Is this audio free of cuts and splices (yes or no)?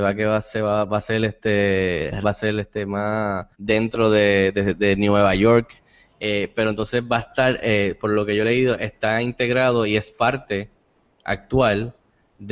no